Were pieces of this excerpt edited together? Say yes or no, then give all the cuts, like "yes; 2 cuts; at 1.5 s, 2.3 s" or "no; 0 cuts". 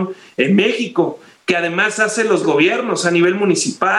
yes; 1 cut; at 2.4 s